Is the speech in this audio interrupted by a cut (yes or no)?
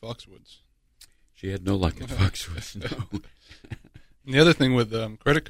no